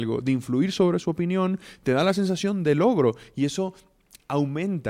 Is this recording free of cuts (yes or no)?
yes